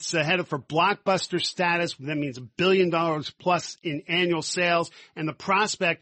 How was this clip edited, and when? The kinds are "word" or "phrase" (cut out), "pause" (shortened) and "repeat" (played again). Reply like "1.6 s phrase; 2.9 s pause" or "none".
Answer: none